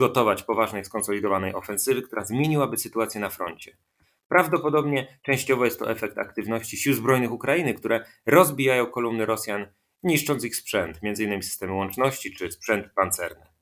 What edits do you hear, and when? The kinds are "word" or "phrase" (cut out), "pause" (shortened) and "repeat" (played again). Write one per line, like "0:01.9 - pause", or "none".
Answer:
none